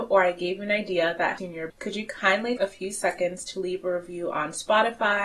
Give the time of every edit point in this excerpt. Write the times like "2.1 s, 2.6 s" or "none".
1.4 s, 1.7 s, 2.6 s